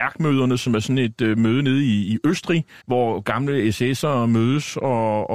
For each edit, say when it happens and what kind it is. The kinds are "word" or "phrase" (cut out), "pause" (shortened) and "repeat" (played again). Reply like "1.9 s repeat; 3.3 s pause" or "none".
2.8 s pause